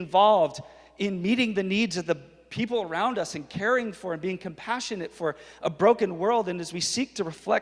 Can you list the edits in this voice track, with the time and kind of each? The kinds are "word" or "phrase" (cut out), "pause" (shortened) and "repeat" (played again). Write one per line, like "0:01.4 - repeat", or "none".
none